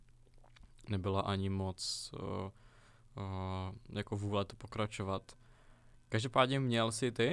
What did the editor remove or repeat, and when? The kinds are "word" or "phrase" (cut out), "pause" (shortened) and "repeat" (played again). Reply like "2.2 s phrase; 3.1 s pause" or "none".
none